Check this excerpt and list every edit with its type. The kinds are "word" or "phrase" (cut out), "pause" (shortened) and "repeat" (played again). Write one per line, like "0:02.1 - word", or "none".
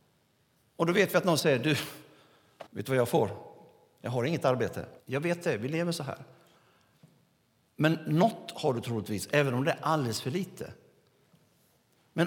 0:02.7 - pause
0:05.0 - pause